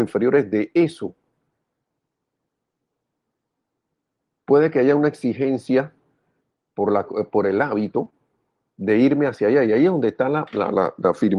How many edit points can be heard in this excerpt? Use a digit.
0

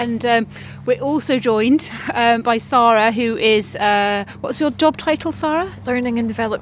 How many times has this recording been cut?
0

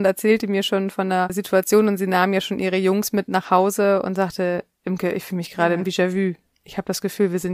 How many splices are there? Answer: 0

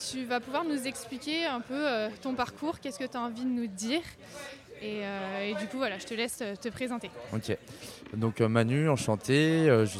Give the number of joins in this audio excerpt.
0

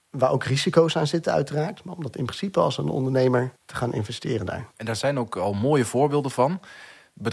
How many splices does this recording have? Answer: 2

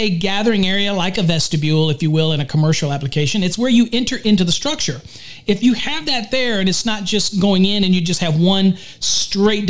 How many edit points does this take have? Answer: 0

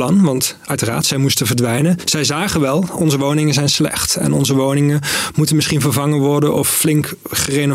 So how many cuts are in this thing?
0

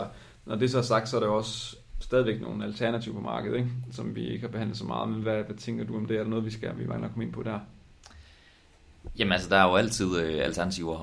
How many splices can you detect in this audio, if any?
0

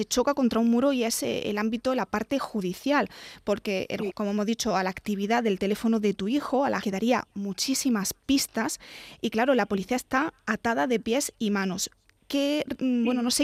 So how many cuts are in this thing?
2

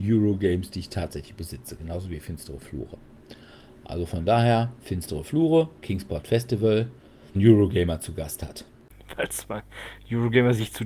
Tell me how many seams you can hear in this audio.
2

